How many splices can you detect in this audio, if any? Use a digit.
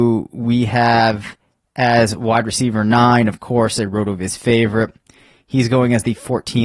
0